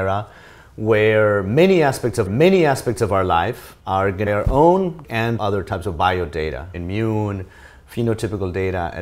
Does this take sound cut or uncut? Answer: cut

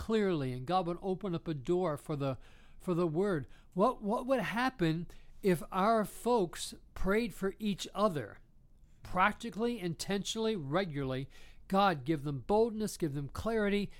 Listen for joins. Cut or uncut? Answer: uncut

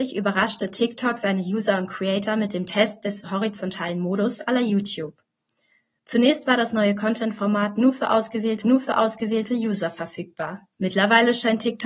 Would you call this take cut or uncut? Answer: cut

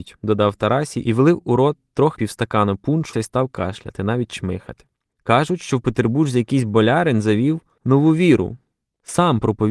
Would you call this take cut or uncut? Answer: cut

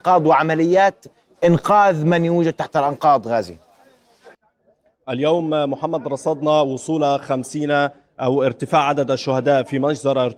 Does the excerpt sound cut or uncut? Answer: uncut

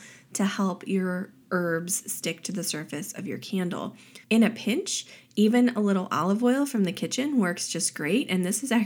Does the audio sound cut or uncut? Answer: cut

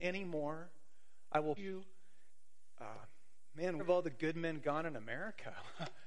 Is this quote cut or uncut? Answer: cut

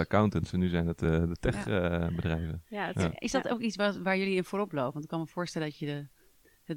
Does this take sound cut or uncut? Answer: uncut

